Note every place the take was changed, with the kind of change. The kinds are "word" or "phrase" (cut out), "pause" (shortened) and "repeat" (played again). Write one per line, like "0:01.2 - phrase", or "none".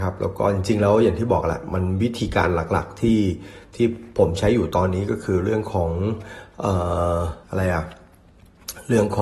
0:07.4 - pause